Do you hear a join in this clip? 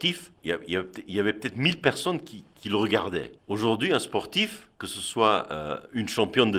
yes; 1 cut; at 3.4 s

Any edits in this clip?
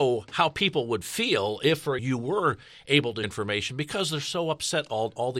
yes; 2 cuts; at 2.0 s, 3.2 s

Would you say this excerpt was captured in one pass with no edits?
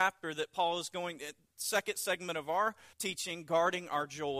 no; 1 cut; at 2.9 s

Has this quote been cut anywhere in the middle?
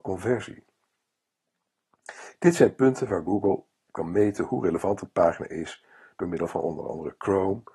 no; 0 cuts

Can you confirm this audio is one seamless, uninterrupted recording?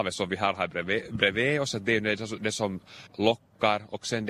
yes; 0 cuts

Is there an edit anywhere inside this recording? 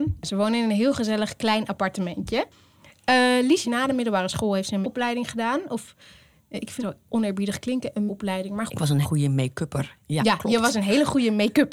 yes; 6 cuts; at 3.6 s, 4.8 s, 6.8 s, 8.1 s, 8.7 s, 9.0 s

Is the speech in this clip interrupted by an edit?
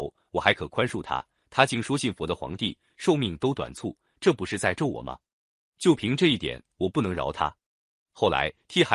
no; 0 cuts

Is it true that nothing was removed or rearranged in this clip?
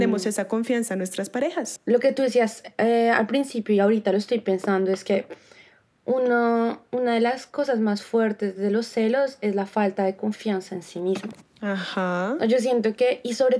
yes; 0 cuts

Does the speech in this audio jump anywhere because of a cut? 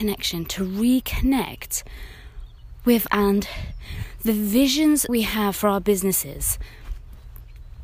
yes; 2 cuts; at 3.1 s, 5.1 s

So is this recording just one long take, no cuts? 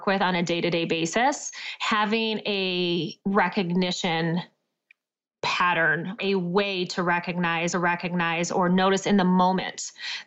no; 3 cuts; at 3.2 s, 6.2 s, 7.7 s

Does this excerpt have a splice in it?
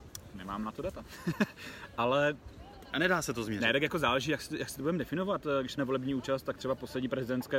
yes; 1 cut; at 5.8 s

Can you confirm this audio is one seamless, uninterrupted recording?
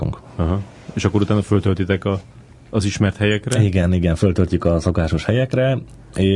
yes; 0 cuts

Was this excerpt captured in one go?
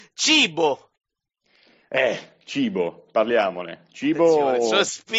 yes; 0 cuts

